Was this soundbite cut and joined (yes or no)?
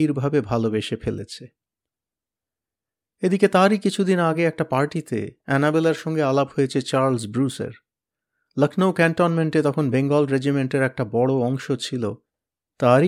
no